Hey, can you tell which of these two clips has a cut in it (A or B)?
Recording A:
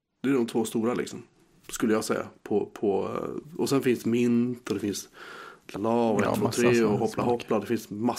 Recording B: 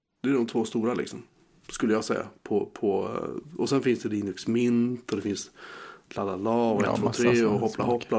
A